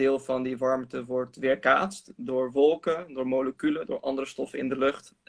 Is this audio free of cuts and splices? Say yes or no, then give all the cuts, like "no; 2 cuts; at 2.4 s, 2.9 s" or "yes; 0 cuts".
yes; 0 cuts